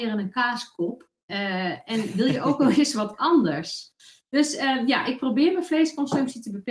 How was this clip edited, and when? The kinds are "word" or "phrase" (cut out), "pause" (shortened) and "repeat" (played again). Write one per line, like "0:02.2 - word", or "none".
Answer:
0:01.2 - pause